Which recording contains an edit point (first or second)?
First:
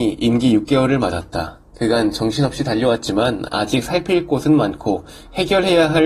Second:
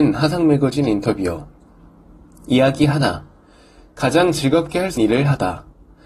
second